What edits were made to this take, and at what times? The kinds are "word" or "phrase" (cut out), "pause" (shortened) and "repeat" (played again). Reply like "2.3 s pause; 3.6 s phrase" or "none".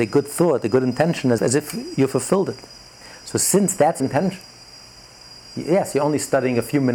1.4 s word; 4.0 s word